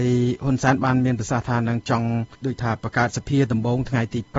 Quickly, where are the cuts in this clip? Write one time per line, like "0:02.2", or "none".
0:02.3